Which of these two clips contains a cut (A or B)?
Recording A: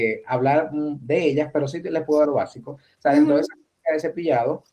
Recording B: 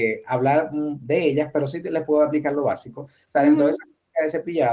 A